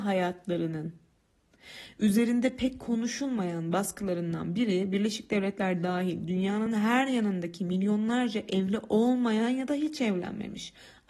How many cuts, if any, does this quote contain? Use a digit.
0